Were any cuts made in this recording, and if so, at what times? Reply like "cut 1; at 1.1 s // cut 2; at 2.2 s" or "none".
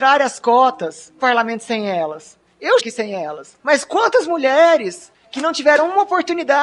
cut 1; at 1.2 s // cut 2; at 2.8 s // cut 3; at 3.6 s